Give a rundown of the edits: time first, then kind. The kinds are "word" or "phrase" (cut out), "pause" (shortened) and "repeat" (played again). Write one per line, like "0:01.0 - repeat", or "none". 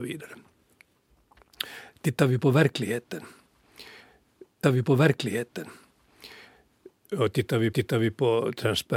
0:04.6 - repeat
0:07.7 - repeat